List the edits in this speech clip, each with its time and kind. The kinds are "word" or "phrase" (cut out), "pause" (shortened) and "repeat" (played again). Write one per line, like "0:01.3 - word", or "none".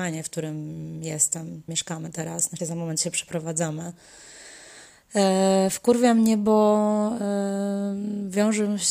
0:01.7 - phrase
0:02.6 - word